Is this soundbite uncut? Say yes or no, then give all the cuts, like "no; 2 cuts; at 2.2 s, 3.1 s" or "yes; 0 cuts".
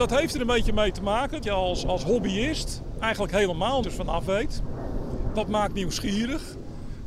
no; 2 cuts; at 1.4 s, 3.8 s